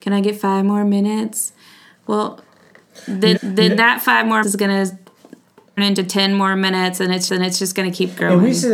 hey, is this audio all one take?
no; 4 cuts; at 3.4 s, 4.4 s, 5.8 s, 7.3 s

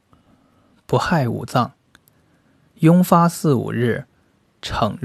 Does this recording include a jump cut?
no; 0 cuts

